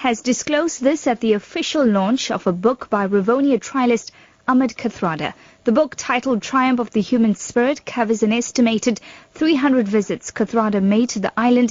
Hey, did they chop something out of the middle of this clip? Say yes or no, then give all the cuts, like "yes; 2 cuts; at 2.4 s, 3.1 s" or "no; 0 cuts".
no; 0 cuts